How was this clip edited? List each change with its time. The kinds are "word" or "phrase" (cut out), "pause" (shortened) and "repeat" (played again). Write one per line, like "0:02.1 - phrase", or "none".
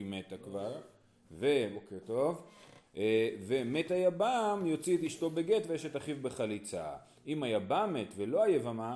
none